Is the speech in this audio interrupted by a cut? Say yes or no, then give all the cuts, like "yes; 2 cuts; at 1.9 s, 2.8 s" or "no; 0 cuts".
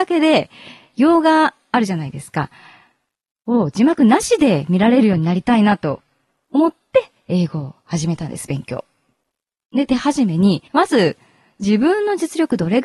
yes; 1 cut; at 10.7 s